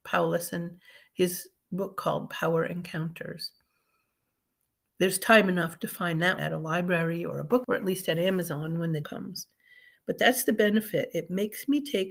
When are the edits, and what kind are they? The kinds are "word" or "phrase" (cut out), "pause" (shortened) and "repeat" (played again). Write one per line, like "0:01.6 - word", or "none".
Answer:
0:06.4 - word
0:07.6 - word
0:09.0 - word

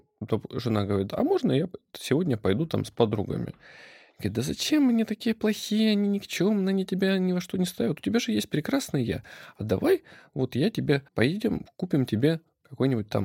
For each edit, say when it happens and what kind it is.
0:11.1 - pause

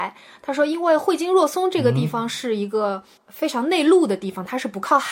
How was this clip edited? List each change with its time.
0:03.2 - pause

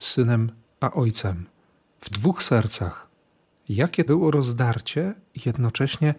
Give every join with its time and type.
0:02.1 - word
0:04.1 - word

